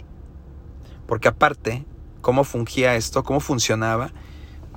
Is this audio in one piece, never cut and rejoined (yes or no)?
yes